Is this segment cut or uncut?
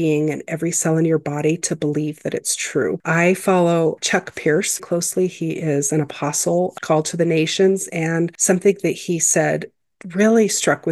cut